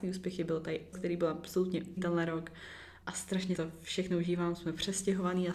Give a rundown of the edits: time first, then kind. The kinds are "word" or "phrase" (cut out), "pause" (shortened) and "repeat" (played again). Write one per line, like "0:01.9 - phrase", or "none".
0:00.9 - word
0:02.0 - word
0:03.0 - word
0:03.5 - word